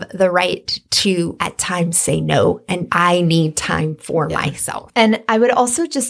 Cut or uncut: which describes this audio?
uncut